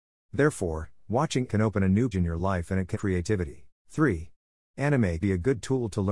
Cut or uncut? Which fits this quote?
cut